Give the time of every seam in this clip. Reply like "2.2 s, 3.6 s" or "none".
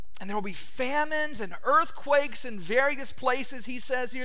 none